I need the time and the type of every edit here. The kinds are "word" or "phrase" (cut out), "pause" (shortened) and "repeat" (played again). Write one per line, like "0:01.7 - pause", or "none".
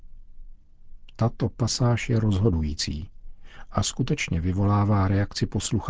none